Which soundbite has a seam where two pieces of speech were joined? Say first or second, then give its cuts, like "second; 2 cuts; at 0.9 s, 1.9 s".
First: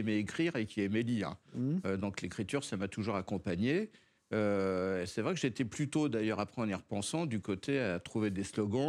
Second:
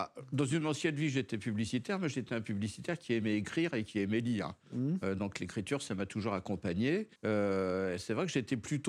second; 1 cut; at 7.2 s